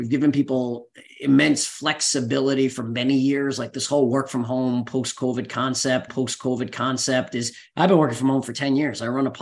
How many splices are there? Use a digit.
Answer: 1